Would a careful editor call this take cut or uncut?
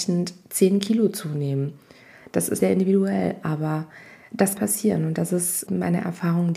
cut